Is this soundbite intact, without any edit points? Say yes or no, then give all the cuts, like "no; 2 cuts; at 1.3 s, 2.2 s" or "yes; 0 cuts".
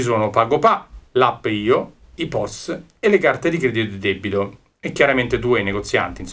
no; 1 cut; at 1.1 s